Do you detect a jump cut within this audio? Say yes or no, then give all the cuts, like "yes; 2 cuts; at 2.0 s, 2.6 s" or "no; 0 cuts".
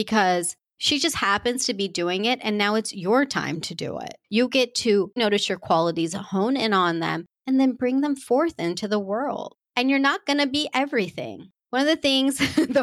yes; 2 cuts; at 4.2 s, 5.2 s